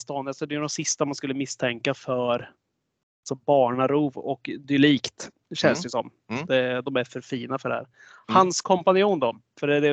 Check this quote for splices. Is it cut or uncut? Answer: uncut